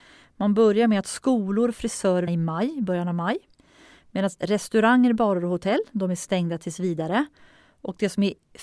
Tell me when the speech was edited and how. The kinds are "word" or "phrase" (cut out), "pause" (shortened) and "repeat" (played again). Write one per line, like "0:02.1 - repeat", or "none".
0:02.3 - phrase